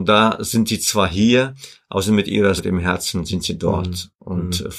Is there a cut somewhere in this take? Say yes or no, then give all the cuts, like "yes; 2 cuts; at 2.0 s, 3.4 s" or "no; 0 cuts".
yes; 1 cut; at 2.6 s